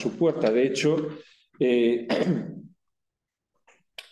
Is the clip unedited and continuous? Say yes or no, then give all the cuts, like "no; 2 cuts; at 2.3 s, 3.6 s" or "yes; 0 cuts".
yes; 0 cuts